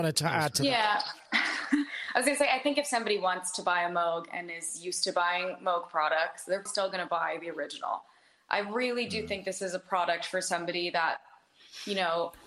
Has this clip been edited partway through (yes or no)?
yes